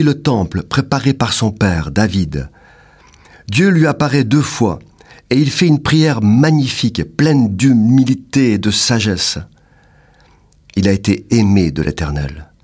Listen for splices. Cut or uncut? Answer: uncut